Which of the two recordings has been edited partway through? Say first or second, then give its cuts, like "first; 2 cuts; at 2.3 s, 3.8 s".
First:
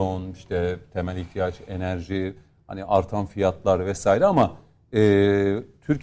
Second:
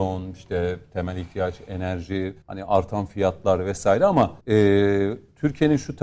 second; 2 cuts; at 2.4 s, 4.4 s